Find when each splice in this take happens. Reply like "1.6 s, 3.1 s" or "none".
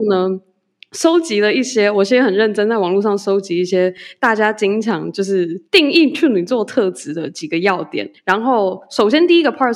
5.7 s, 8.2 s